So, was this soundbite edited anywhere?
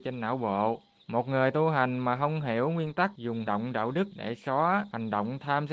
yes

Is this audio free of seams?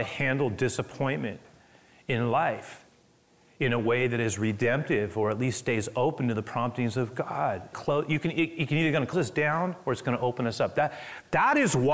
no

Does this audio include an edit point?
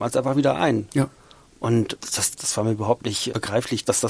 no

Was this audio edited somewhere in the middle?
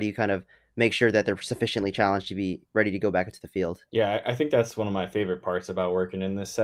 yes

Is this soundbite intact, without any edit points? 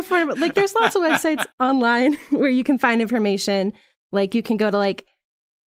no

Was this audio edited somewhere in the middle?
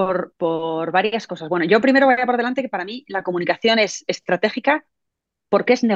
no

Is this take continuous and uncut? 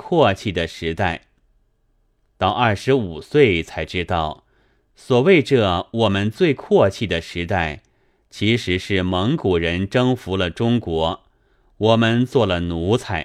yes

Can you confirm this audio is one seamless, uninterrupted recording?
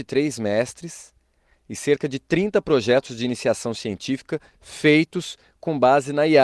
yes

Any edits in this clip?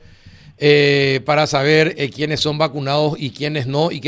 no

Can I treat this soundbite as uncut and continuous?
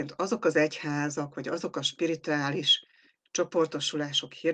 yes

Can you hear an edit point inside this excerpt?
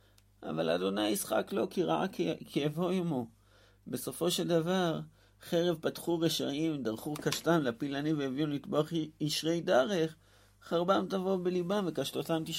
no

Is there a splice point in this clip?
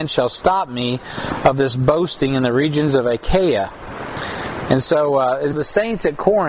yes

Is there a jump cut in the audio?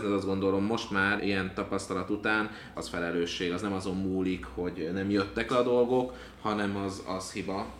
yes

